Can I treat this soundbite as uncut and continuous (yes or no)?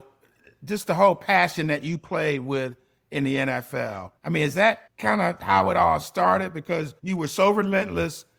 no